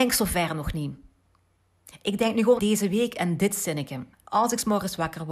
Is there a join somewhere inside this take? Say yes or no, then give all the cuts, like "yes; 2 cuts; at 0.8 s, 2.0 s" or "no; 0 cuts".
yes; 2 cuts; at 2.6 s, 4.1 s